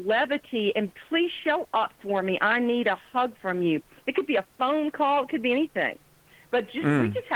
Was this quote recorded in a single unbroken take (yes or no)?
yes